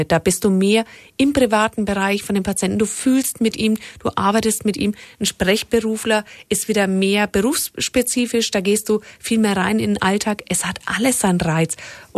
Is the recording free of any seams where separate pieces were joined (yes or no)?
yes